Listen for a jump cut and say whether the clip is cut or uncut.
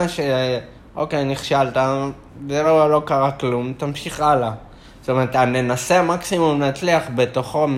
uncut